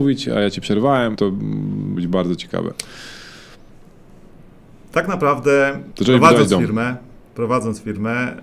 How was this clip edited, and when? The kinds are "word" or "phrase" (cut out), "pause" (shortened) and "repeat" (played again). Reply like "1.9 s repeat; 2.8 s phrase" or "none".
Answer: 1.2 s word; 2.0 s word; 5.9 s word